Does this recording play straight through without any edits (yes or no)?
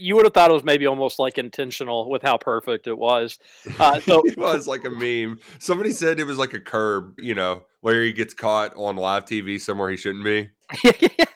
no